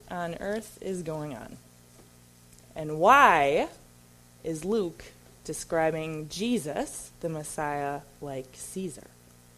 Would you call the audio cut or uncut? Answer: uncut